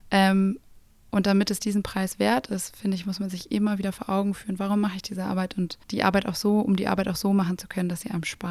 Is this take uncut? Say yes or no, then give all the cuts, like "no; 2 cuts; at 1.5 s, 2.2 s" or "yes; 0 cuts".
no; 1 cut; at 5.8 s